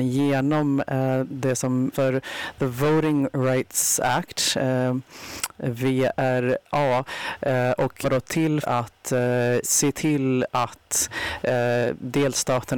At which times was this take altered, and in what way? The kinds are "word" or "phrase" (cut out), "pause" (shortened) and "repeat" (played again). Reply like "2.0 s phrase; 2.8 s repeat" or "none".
1.9 s word; 8.0 s word; 8.6 s word; 9.6 s word